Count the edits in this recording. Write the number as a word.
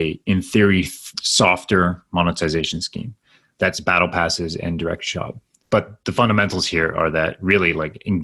zero